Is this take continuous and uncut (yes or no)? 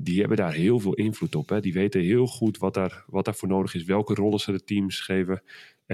yes